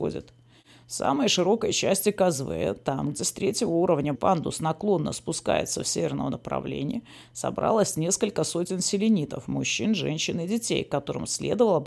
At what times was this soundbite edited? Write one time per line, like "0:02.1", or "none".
0:04.2